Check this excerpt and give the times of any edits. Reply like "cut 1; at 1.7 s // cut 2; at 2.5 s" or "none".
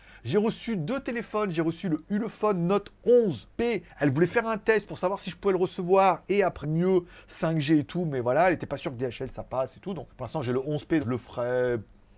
cut 1; at 3.5 s // cut 2; at 6.6 s // cut 3; at 10.1 s // cut 4; at 11.0 s